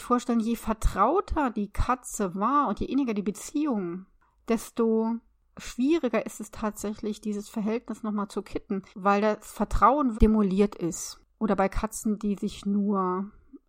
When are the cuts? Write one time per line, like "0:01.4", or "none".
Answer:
0:08.9
0:10.1